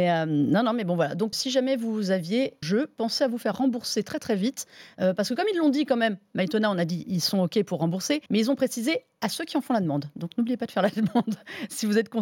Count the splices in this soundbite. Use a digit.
3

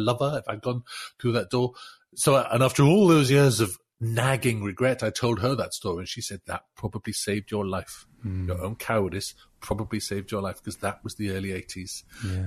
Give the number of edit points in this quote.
0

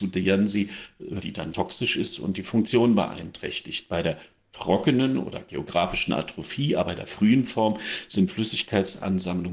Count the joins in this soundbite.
4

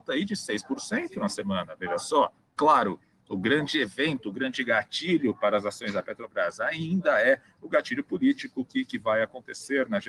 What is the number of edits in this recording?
0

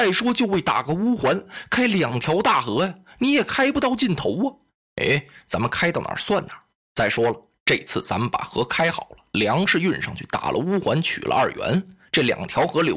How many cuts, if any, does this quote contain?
0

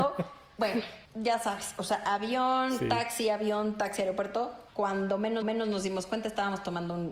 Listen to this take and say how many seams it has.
3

